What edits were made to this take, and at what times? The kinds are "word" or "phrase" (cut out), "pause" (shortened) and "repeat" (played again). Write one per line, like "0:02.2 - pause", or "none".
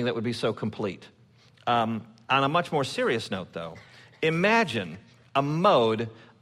none